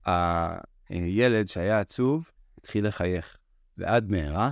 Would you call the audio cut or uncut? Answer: cut